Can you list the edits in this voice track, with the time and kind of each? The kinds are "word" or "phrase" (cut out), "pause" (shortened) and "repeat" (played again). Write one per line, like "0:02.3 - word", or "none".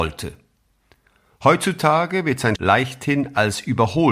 0:02.6 - word